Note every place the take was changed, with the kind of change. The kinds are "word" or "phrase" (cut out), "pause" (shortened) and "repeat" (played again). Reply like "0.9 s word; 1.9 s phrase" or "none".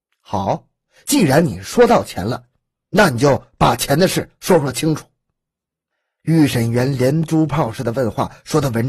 none